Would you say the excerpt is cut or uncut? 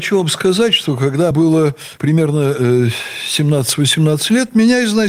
cut